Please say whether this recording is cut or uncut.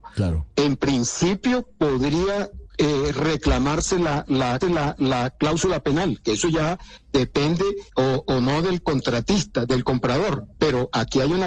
cut